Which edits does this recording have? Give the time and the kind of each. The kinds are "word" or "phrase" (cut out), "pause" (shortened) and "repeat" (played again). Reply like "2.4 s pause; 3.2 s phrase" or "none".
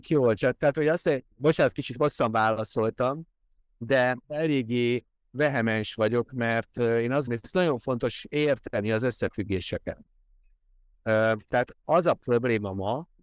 1.3 s pause; 4.2 s pause; 7.3 s word